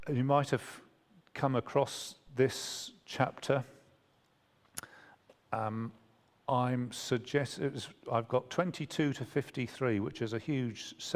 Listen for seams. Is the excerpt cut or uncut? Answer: uncut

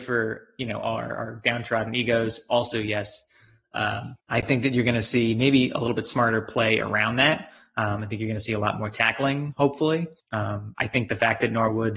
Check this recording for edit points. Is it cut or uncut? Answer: cut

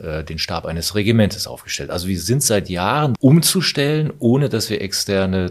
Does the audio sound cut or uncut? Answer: cut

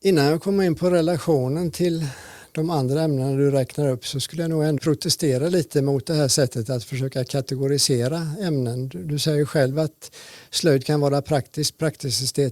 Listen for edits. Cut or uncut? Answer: cut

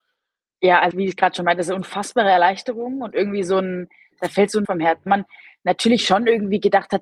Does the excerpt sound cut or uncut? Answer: cut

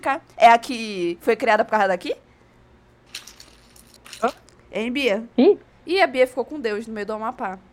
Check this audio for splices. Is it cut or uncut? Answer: cut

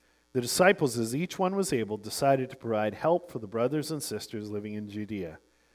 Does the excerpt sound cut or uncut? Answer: uncut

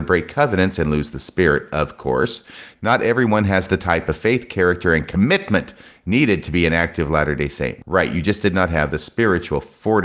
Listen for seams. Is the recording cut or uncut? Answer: uncut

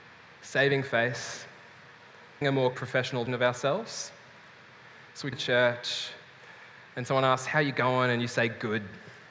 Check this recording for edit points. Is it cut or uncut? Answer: cut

